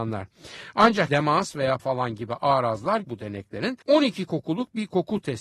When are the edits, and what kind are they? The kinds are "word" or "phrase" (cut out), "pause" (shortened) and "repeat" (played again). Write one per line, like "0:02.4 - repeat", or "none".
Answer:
0:01.1 - word
0:01.8 - word
0:03.0 - word
0:03.8 - pause